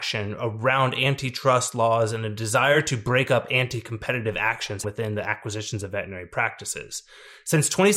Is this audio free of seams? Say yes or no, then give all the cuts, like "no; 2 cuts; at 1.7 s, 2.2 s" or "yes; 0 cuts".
no; 1 cut; at 4.8 s